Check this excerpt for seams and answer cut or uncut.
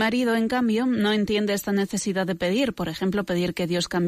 uncut